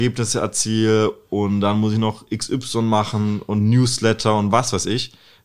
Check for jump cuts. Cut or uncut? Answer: uncut